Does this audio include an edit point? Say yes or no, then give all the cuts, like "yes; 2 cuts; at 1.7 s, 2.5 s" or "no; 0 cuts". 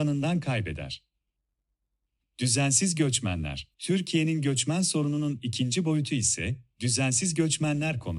yes; 1 cut; at 3.7 s